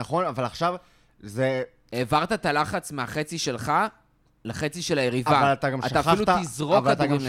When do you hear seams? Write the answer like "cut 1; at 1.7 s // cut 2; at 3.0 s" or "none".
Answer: none